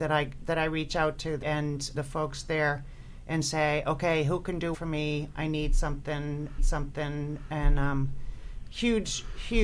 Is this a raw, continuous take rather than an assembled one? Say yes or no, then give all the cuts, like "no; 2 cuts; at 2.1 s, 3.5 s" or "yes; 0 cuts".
no; 4 cuts; at 1.4 s, 1.9 s, 4.7 s, 6.6 s